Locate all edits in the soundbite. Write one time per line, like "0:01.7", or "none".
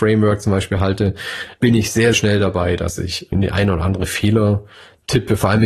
0:02.1
0:03.3